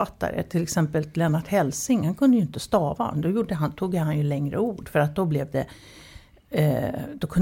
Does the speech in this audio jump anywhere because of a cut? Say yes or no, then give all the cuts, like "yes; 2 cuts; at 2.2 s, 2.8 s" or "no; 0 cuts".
no; 0 cuts